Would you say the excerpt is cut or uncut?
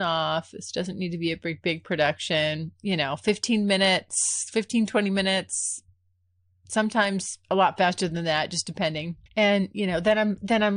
cut